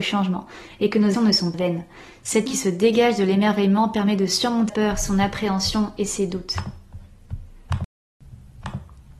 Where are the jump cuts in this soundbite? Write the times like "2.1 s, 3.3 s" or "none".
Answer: 1.1 s, 1.5 s, 2.5 s, 4.7 s